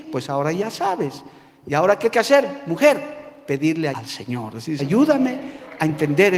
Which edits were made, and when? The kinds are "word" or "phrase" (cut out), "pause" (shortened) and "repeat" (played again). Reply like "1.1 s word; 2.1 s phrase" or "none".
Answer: 2.1 s word; 3.9 s word; 4.8 s word